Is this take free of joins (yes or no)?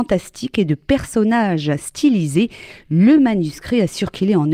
yes